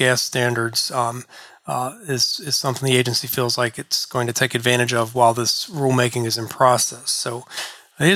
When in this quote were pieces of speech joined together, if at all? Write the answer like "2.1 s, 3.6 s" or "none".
none